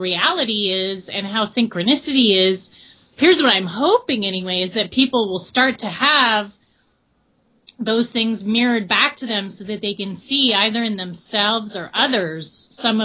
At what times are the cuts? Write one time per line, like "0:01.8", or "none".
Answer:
none